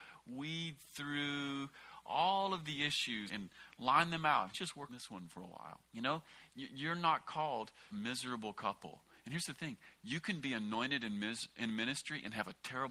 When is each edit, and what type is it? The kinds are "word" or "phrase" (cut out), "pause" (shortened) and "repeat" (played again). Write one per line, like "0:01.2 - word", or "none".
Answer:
0:03.3 - word
0:04.5 - phrase
0:04.9 - word
0:05.8 - pause
0:07.9 - phrase